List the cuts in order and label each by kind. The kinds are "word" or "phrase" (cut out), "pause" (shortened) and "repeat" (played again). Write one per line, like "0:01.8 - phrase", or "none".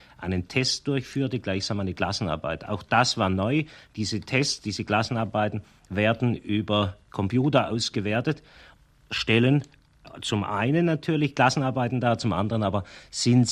none